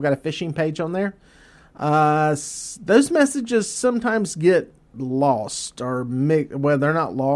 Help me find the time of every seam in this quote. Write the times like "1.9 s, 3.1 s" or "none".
none

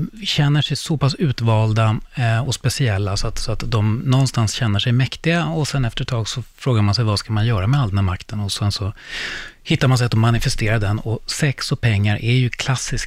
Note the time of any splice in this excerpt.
none

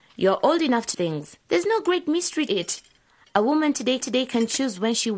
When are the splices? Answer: 0.9 s, 1.4 s, 2.5 s, 4.0 s

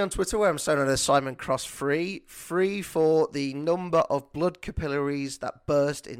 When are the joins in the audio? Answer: none

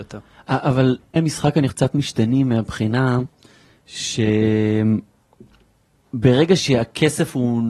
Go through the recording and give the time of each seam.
1.2 s, 1.7 s

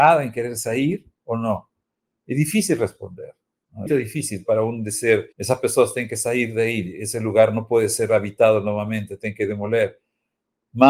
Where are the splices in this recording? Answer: 3.9 s, 5.3 s

